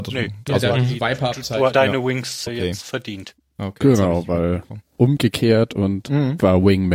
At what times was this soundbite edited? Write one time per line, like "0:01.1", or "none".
0:01.7
0:02.5
0:04.9